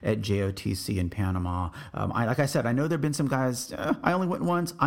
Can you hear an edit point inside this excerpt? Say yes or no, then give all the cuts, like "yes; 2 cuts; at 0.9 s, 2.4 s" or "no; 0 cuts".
no; 0 cuts